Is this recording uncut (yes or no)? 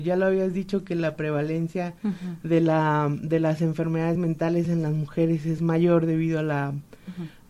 yes